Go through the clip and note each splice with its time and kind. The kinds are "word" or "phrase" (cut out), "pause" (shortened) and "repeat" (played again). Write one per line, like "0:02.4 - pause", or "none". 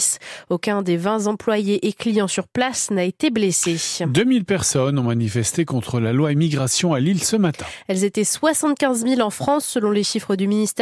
none